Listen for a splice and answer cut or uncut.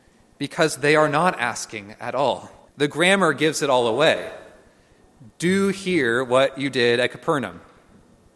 cut